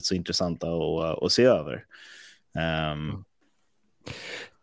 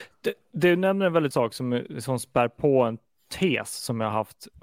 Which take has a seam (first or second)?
second